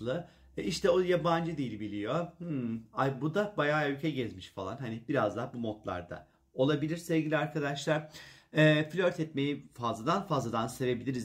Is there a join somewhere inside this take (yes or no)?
no